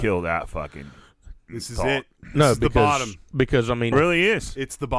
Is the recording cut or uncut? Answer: cut